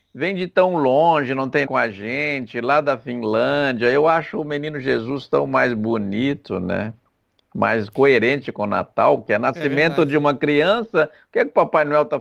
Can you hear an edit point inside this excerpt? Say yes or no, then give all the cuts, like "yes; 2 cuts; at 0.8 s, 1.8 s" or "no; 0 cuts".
yes; 1 cut; at 1.7 s